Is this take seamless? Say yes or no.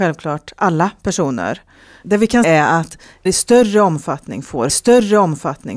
no